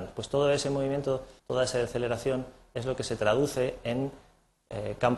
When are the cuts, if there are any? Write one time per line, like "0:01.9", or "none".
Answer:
0:01.4

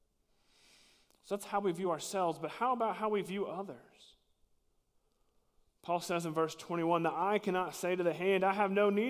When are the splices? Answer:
none

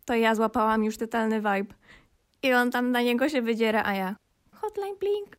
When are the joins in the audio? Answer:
0:01.0

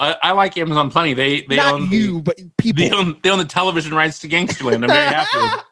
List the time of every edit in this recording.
none

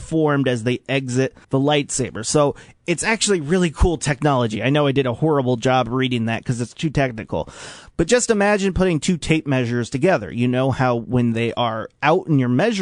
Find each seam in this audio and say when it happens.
0:01.4

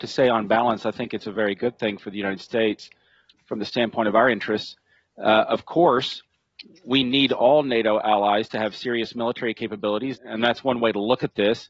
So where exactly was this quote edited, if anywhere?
0:10.2

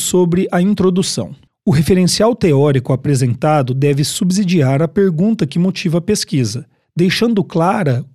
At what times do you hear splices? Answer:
0:01.5
0:06.8

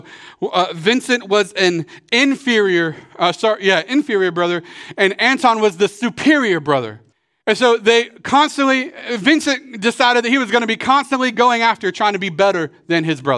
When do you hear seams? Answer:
0:07.1

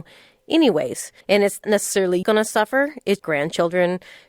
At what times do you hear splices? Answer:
0:01.2
0:01.6
0:02.2
0:03.2

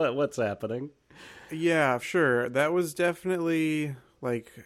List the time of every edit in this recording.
0:02.0

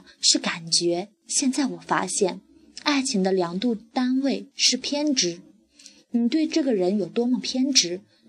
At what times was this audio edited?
0:01.1

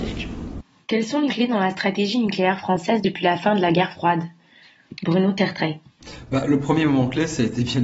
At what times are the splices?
0:01.3

